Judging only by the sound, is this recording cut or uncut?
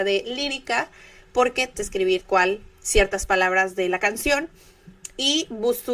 cut